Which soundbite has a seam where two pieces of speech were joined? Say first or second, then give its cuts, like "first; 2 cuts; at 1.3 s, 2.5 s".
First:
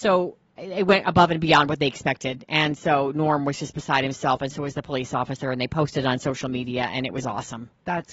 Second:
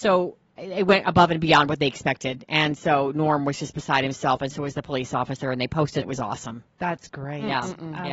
second; 1 cut; at 6.0 s